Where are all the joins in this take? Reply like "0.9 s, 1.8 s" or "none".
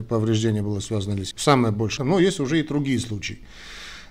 1.3 s, 2.0 s